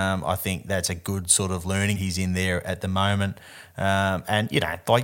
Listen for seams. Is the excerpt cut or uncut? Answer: cut